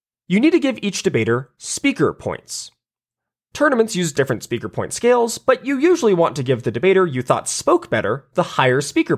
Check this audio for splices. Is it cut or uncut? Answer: uncut